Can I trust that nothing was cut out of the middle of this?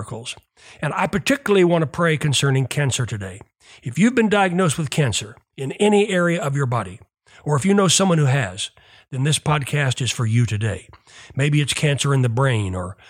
yes; 0 cuts

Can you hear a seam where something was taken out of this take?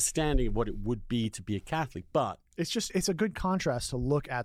no; 0 cuts

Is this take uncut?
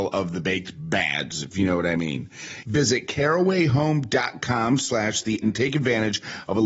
no; 1 cut; at 5.4 s

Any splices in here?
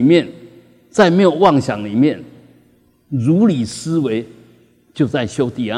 no; 0 cuts

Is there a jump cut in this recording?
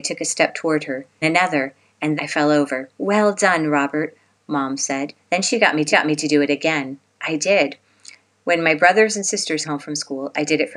yes; 6 cuts; at 1.2 s, 2.2 s, 2.9 s, 5.2 s, 5.9 s, 9.6 s

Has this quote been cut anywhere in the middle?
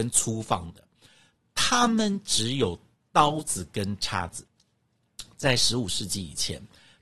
no; 0 cuts

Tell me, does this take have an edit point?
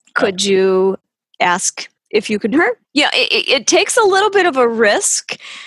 yes; 4 cuts; at 2.0 s, 2.5 s, 2.8 s, 3.7 s

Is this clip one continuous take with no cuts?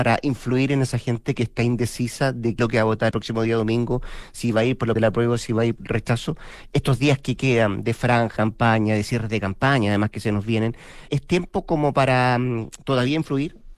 no; 6 cuts; at 2.6 s, 3.1 s, 5.0 s, 5.8 s, 8.4 s, 11.1 s

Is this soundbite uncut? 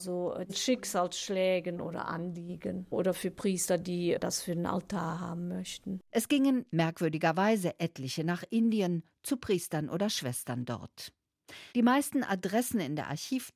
no; 3 cuts; at 6.1 s, 6.7 s, 11.7 s

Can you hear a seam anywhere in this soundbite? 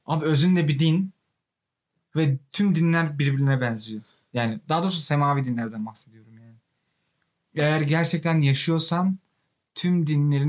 no; 0 cuts

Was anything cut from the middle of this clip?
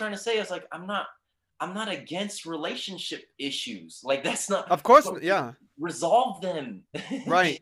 no; 0 cuts

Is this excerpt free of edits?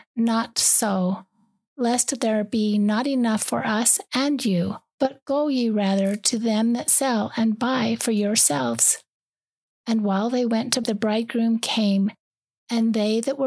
no; 1 cut; at 10.8 s

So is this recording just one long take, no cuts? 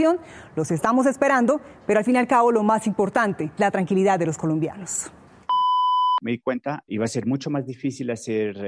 no; 2 cuts; at 3.6 s, 6.9 s

